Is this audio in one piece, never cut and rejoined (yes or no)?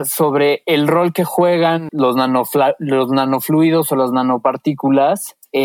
no